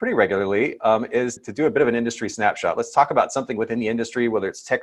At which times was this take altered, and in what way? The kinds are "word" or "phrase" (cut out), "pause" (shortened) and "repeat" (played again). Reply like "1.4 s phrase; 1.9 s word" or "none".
1.4 s word